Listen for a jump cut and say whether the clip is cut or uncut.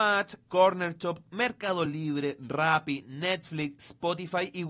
uncut